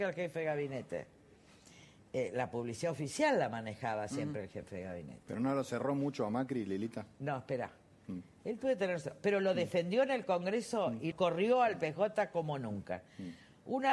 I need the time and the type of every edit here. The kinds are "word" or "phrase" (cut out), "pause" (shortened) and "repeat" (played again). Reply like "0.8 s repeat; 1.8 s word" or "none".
11.1 s word

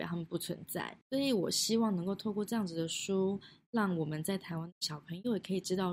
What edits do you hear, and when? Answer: 1.0 s pause

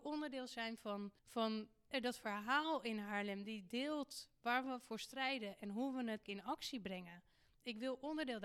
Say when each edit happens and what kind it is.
1.2 s pause; 6.2 s word

